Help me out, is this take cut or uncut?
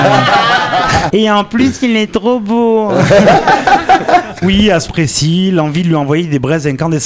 cut